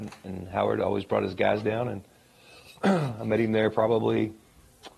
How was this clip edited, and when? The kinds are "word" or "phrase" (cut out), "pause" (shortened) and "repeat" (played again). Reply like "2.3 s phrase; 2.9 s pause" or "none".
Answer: none